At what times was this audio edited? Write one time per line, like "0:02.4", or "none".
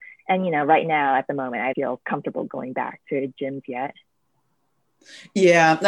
0:01.7